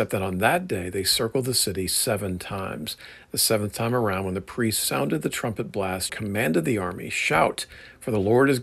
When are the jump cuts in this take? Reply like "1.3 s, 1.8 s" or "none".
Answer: 6.1 s